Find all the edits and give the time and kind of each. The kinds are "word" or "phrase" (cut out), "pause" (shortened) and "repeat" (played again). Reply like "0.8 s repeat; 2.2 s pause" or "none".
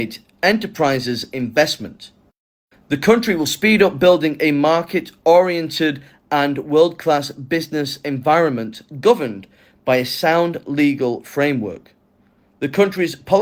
none